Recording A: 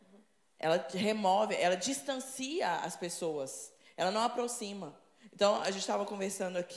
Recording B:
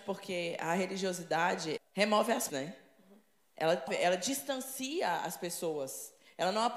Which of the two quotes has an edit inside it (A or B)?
B